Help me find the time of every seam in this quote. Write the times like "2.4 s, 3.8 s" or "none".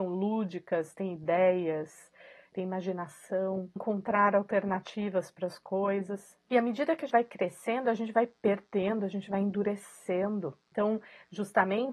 3.8 s, 7.1 s

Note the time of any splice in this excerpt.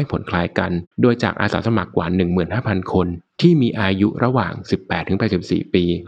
0.9 s

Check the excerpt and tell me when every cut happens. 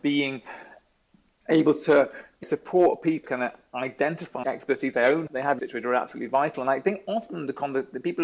2.4 s, 3.2 s, 4.4 s, 5.3 s, 5.6 s

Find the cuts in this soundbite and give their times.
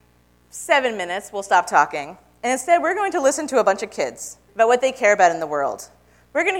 4.5 s

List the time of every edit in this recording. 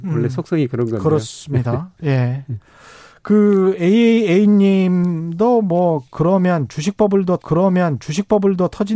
7.4 s

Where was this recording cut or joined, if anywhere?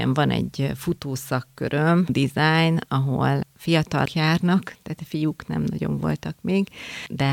2.1 s, 4.1 s

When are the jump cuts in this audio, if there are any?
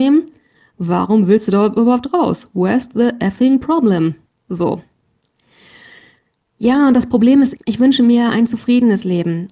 7.5 s

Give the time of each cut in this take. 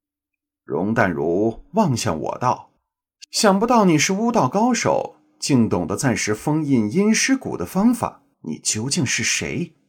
2.8 s, 8.3 s

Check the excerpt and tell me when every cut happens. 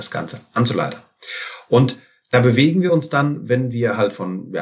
none

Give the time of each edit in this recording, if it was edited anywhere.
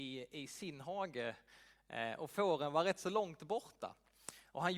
none

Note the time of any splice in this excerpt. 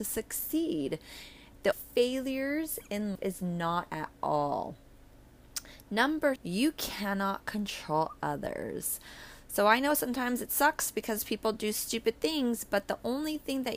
1.7 s, 3.2 s, 3.9 s, 6.4 s

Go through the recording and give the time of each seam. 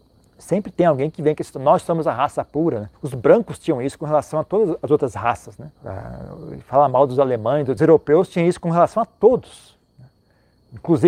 2.9 s, 5.8 s, 7.8 s

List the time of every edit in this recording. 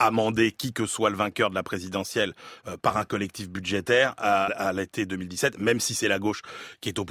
4.5 s

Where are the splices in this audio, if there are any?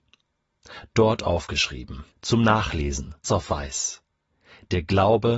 2.1 s, 3.2 s

